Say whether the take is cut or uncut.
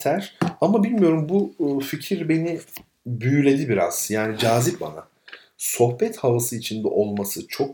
cut